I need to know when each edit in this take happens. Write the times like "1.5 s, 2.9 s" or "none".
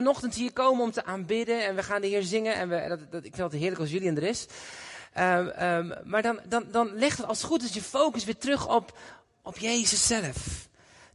none